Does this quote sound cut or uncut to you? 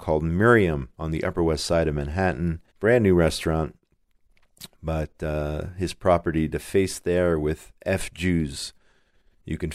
cut